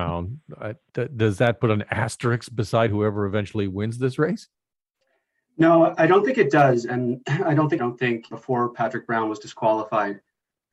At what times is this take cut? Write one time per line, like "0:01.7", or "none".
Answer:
0:07.8
0:08.3